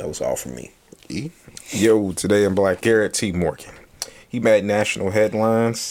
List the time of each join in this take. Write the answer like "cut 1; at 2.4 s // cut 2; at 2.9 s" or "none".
cut 1; at 2.8 s